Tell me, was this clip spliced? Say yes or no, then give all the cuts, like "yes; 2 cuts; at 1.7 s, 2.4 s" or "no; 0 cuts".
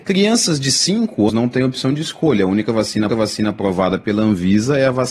yes; 2 cuts; at 1.3 s, 3.1 s